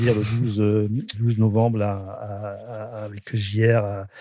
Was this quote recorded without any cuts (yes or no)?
no